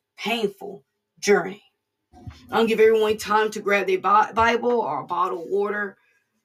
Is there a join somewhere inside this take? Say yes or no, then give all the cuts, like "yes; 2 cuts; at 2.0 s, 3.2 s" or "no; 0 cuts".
no; 0 cuts